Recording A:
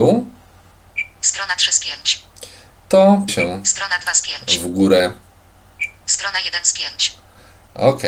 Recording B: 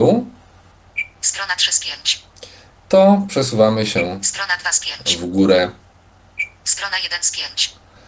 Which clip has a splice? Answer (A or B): A